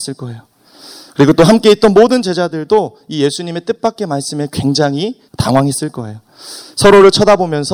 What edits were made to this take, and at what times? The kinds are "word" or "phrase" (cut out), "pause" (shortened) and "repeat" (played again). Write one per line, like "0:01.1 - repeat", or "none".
0:05.3 - pause